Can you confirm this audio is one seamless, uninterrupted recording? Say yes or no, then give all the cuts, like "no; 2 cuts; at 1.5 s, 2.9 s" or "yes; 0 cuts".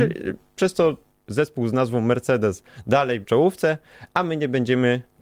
no; 2 cuts; at 1.3 s, 3.2 s